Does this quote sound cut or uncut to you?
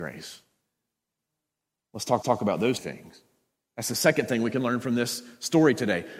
cut